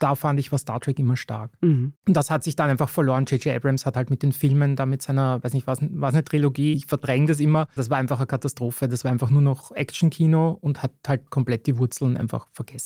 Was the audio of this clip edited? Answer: yes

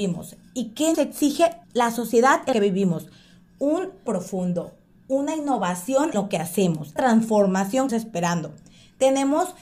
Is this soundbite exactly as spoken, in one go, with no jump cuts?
no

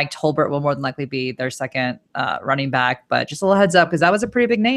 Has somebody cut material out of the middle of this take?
no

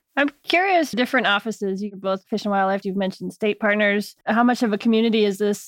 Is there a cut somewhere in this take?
yes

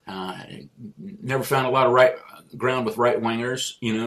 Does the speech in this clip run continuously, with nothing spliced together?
yes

